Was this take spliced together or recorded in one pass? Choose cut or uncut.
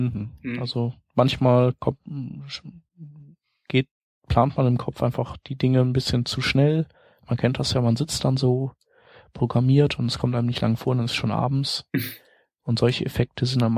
uncut